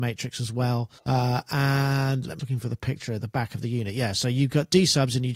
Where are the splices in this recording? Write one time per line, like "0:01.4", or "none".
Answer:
0:01.0
0:02.4